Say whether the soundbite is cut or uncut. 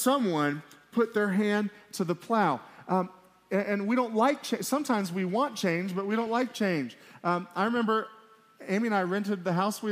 uncut